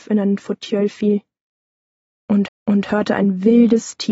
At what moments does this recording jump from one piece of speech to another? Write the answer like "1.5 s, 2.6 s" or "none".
2.5 s